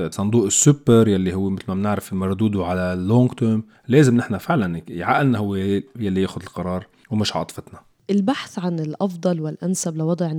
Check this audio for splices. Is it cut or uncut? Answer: uncut